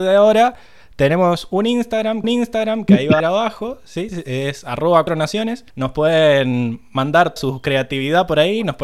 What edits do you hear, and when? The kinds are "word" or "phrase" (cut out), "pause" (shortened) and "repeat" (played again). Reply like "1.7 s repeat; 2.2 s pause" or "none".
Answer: 2.2 s repeat; 3.2 s phrase; 5.1 s word; 5.7 s pause; 7.4 s word